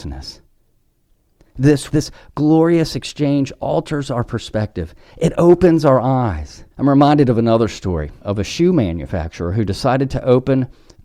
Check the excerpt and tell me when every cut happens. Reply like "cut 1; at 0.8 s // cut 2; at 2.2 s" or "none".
cut 1; at 1.9 s // cut 2; at 6.7 s // cut 3; at 8.2 s